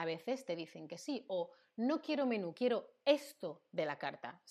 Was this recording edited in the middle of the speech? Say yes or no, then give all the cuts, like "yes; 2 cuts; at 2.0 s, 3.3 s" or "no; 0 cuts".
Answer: no; 0 cuts